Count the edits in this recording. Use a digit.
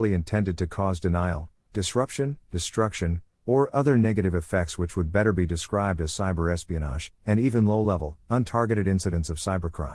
0